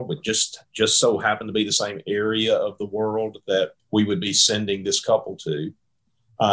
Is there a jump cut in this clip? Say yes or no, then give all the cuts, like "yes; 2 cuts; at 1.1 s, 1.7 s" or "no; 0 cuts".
yes; 1 cut; at 3.8 s